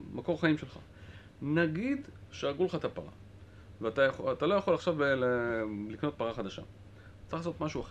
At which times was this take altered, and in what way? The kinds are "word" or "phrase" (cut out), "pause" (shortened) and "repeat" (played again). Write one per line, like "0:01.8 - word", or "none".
none